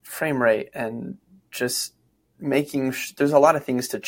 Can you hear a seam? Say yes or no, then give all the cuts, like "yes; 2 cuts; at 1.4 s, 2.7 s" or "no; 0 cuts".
no; 0 cuts